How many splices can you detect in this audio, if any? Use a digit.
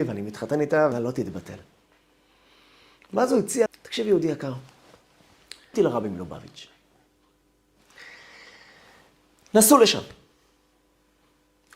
3